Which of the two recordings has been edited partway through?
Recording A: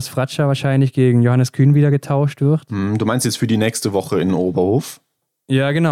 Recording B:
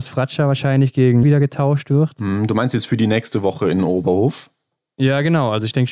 B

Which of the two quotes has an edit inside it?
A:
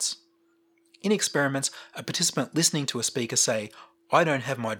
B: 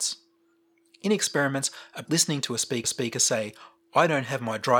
B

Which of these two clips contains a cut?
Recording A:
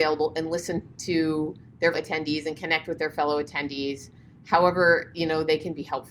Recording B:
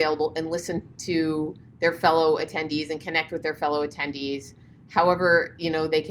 A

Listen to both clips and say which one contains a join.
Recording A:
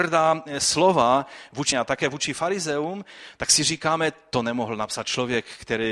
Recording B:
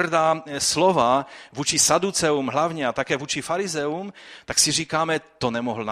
A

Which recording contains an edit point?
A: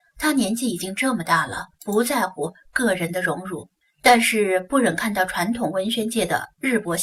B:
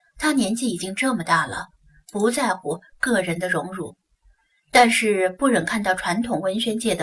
A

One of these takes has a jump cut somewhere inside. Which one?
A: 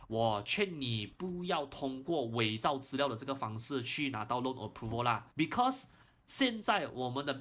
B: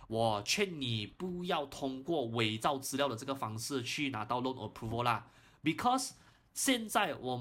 A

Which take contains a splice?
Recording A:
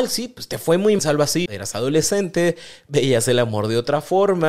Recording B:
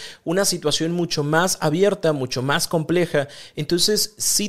A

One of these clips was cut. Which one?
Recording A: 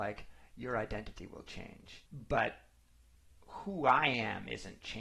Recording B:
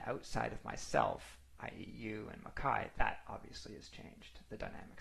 A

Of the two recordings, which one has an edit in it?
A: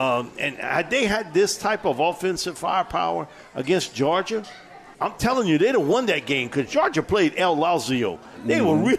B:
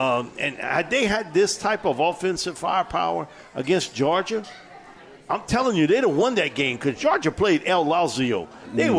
A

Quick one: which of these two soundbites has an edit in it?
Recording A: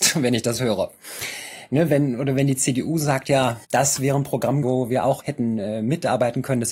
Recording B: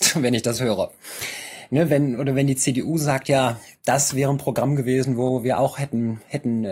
A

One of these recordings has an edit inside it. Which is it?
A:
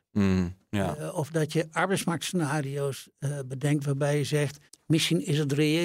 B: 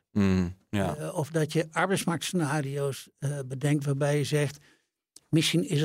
A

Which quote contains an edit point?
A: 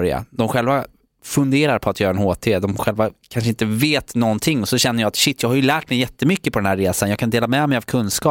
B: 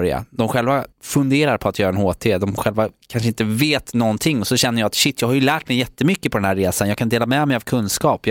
B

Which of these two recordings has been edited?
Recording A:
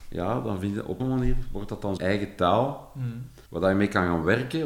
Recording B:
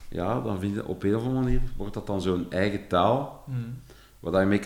A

